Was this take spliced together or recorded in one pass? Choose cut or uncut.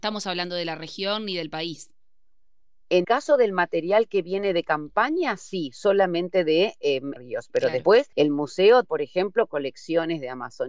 cut